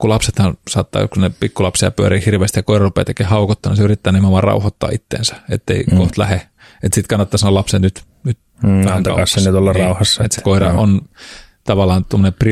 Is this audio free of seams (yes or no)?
yes